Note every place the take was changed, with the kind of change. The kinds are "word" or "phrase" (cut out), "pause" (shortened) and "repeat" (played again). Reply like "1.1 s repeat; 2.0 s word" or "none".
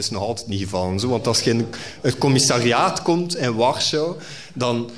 none